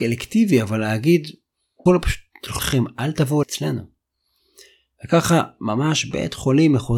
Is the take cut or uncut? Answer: cut